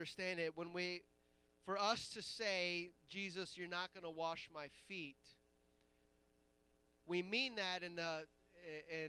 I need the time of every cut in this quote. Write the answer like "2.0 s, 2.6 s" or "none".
none